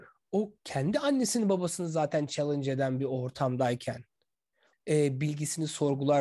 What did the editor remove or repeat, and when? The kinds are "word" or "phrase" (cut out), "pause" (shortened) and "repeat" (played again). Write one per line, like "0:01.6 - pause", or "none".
0:04.7 - word

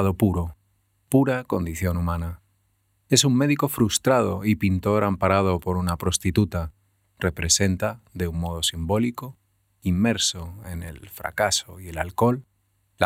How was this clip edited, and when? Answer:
none

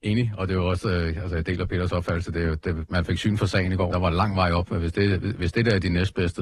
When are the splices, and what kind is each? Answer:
0:03.9 - phrase

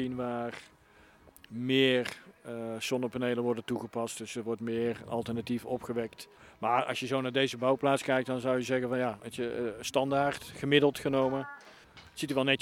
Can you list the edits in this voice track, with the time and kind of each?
0:06.4 - pause

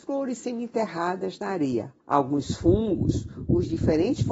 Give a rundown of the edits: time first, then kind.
0:02.0 - pause

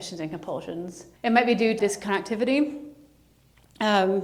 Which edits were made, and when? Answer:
0:01.2 - pause
0:01.8 - phrase

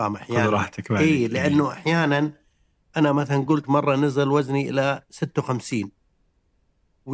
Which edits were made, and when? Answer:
none

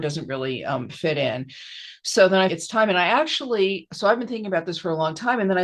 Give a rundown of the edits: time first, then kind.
0:02.5 - phrase

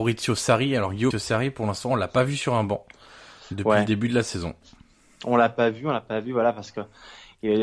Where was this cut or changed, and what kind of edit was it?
0:01.1 - word

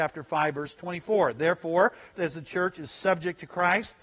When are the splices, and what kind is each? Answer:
0:02.1 - word

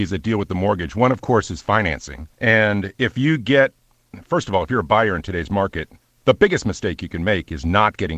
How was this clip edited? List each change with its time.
0:02.3 - pause
0:06.0 - pause

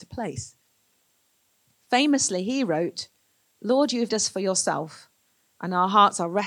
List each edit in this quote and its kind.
0:04.1 - word

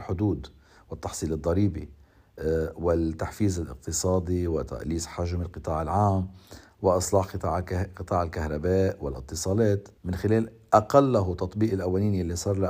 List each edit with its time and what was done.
0:10.0 - pause

